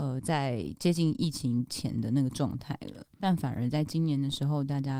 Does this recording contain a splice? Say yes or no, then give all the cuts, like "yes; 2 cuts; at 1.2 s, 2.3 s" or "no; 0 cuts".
yes; 1 cut; at 3.2 s